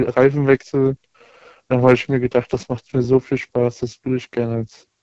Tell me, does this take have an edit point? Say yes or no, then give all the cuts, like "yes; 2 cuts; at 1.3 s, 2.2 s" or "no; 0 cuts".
no; 0 cuts